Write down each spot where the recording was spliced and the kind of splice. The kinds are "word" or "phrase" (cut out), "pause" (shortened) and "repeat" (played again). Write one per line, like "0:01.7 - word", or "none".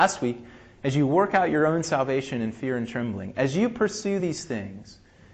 none